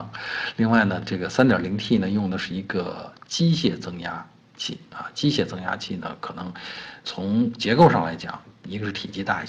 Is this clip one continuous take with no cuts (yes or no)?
no